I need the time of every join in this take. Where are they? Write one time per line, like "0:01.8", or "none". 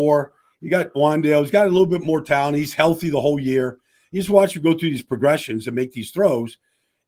none